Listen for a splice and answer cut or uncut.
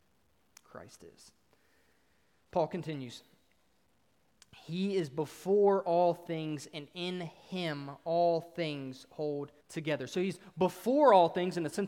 cut